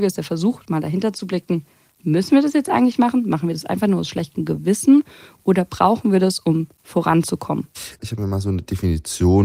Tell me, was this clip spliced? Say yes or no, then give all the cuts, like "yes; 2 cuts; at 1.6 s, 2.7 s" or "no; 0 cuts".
no; 0 cuts